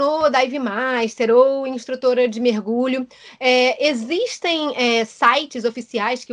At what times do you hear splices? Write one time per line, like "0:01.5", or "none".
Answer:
none